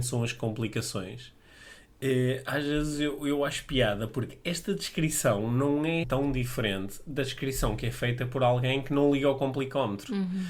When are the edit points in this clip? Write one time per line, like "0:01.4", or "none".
0:06.0